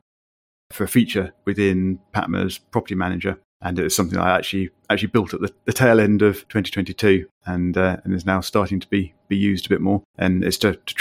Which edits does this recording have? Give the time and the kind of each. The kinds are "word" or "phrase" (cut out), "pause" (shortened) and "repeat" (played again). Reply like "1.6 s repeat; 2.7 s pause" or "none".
1.4 s pause; 3.5 s pause; 6.4 s pause; 10.1 s pause